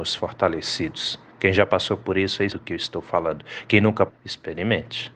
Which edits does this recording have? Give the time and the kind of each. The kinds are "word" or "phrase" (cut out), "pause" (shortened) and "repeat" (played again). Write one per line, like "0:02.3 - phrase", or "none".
0:02.5 - word
0:04.1 - word